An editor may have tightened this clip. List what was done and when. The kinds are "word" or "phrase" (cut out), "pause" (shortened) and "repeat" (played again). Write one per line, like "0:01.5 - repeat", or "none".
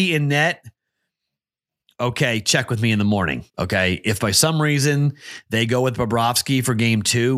0:03.5 - pause